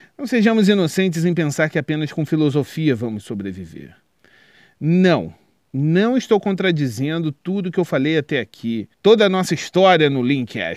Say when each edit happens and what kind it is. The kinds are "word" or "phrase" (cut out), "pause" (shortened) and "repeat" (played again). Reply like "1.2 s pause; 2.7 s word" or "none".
5.6 s pause; 8.9 s pause